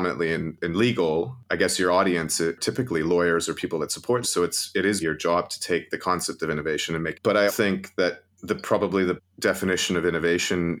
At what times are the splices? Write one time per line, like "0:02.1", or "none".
0:04.2
0:05.0
0:07.1
0:07.5
0:08.3
0:09.2